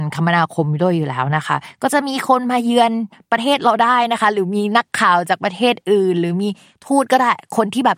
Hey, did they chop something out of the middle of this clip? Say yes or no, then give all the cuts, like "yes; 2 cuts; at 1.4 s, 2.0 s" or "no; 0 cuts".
no; 0 cuts